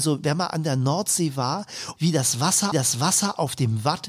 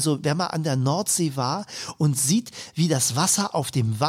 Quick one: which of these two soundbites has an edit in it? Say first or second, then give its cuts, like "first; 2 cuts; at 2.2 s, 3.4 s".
first; 2 cuts; at 2.0 s, 2.7 s